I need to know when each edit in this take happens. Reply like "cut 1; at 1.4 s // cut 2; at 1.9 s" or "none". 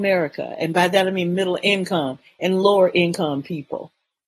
none

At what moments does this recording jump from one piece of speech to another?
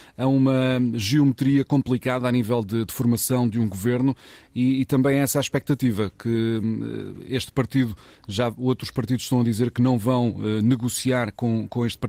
none

